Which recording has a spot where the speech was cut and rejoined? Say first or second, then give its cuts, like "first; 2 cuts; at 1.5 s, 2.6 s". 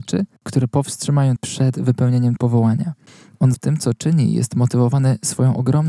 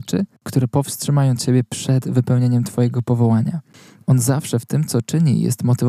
first; 3 cuts; at 1.4 s, 2.4 s, 3.5 s